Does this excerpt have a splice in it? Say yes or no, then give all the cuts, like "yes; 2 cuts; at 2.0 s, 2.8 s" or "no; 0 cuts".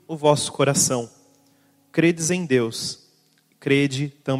no; 0 cuts